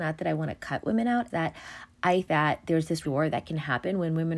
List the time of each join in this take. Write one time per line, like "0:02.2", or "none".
0:01.3
0:02.3
0:03.0